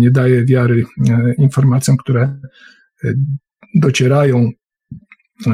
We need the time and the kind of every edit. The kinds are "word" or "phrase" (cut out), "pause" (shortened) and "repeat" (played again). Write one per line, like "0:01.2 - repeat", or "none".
none